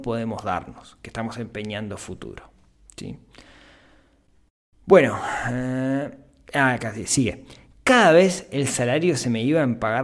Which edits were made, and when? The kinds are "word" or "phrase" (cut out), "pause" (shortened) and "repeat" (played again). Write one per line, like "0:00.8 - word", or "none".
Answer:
none